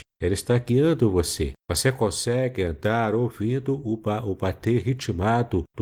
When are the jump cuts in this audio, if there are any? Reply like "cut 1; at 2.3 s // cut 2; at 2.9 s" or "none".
cut 1; at 1.6 s